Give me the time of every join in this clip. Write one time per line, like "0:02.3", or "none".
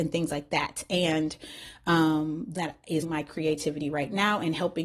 0:02.6
0:03.0